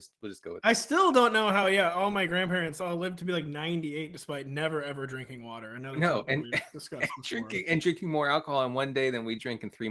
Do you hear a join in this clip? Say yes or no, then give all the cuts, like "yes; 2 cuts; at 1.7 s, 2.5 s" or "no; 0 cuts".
no; 0 cuts